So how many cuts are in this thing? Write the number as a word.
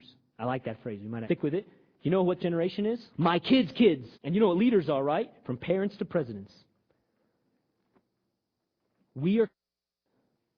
four